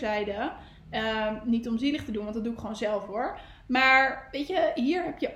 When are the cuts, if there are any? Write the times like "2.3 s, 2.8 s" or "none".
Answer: none